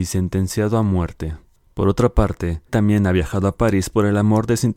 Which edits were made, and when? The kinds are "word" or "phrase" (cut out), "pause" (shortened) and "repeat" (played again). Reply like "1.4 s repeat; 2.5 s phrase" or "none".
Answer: 2.7 s word